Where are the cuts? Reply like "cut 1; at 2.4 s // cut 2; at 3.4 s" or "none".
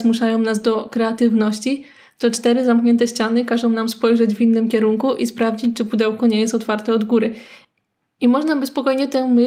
none